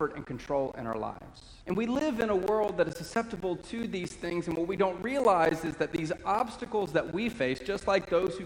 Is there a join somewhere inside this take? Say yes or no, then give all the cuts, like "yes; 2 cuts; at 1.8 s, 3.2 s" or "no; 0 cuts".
yes; 1 cut; at 1.6 s